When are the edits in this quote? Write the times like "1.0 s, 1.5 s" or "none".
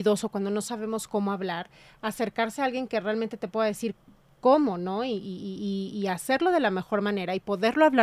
none